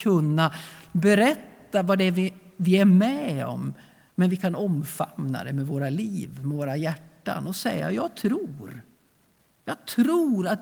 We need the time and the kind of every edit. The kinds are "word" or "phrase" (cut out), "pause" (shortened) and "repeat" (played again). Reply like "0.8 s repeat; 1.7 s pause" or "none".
none